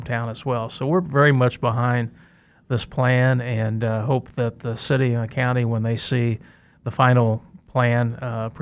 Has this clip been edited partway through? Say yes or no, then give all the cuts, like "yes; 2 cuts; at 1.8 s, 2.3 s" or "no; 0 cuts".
no; 0 cuts